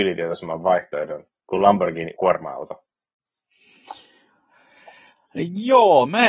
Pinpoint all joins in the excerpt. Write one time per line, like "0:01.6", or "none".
0:02.1